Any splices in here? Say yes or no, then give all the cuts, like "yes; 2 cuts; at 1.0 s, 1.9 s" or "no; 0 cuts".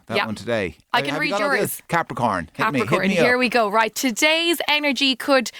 no; 0 cuts